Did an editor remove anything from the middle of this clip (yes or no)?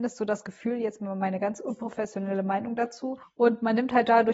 yes